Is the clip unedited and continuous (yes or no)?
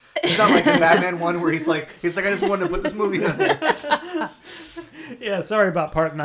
yes